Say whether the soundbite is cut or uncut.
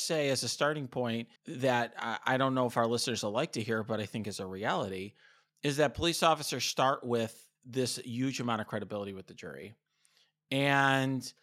cut